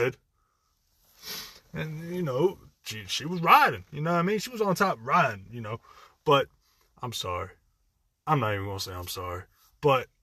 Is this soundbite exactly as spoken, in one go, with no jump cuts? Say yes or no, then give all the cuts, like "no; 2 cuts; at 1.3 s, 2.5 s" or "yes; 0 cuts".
yes; 0 cuts